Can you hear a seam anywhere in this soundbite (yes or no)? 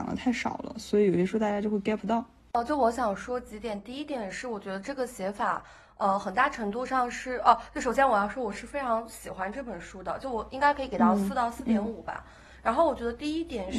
no